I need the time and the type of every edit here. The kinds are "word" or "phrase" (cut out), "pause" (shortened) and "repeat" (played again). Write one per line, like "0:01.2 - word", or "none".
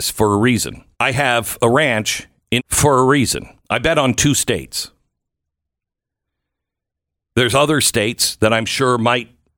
0:00.9 - pause
0:02.6 - word
0:03.6 - pause